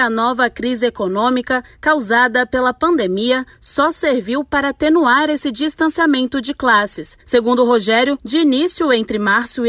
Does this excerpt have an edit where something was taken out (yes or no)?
no